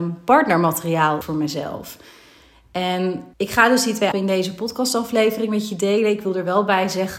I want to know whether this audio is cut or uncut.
cut